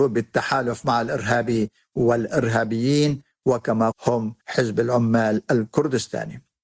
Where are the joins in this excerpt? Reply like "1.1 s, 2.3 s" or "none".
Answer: 3.9 s, 4.4 s